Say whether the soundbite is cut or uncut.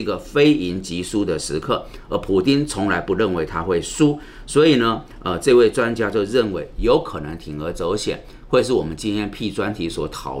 uncut